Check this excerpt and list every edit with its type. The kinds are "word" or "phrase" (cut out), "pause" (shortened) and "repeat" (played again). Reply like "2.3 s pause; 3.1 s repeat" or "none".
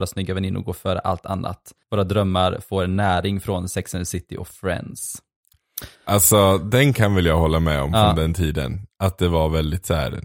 1.8 s pause; 5.9 s pause